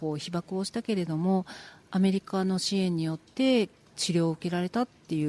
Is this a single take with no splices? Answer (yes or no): yes